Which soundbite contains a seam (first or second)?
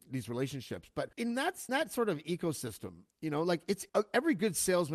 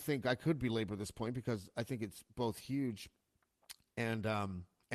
first